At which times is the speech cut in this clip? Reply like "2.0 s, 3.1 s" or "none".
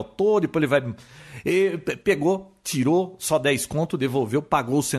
none

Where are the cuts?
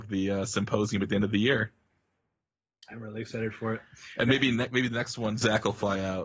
none

